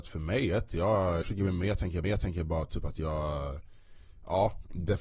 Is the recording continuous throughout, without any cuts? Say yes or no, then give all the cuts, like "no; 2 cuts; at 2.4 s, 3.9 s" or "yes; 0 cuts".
no; 2 cuts; at 1.2 s, 2.0 s